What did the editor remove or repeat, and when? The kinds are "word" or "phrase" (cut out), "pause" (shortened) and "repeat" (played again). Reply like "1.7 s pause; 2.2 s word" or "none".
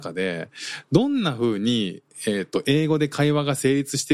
none

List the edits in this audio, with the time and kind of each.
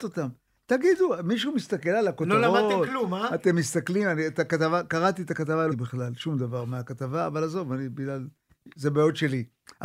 5.7 s phrase

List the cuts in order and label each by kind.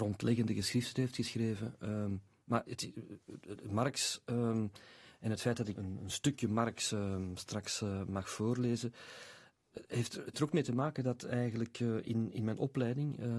2.7 s word; 5.8 s word; 10.3 s word

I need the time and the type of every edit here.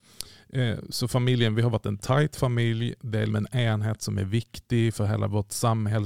3.3 s word

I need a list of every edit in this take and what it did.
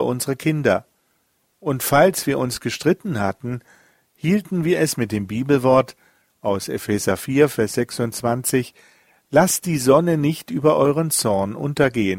none

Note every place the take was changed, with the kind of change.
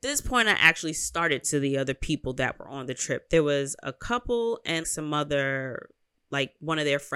1.4 s word; 4.8 s word

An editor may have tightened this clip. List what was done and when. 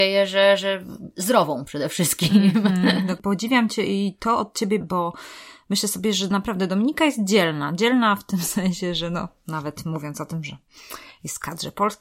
4.8 s word

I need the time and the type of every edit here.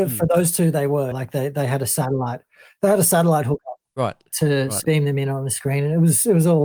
1.1 s word; 3.8 s word; 4.8 s word

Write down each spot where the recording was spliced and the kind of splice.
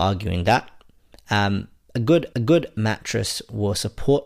2.3 s repeat

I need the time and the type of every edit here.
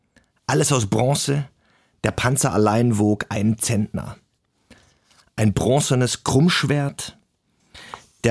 none

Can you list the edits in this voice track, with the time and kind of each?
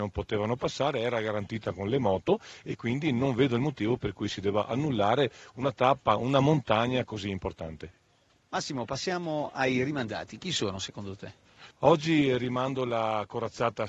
11.7 s pause

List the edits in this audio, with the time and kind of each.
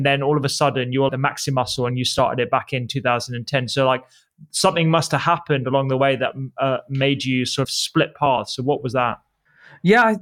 1.1 s word; 7.6 s word

